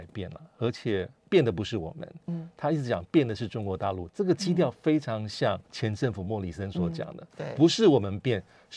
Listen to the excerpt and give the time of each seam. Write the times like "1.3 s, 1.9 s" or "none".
5.7 s